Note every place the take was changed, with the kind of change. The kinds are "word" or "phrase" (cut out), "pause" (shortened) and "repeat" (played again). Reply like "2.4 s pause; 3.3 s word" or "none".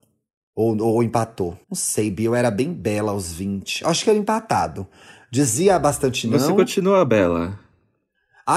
1.6 s pause